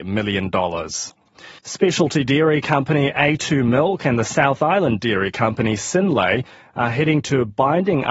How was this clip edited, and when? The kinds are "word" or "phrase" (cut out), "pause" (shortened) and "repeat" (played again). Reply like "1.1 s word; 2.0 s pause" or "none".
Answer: 1.6 s pause